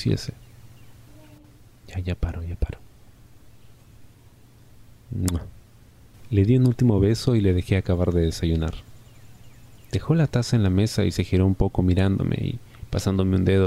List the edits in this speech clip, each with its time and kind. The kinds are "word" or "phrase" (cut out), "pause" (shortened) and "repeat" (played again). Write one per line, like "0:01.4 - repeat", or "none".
none